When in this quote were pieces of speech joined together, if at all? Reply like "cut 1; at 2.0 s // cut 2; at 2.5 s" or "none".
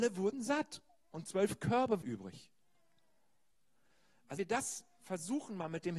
cut 1; at 2.0 s // cut 2; at 4.4 s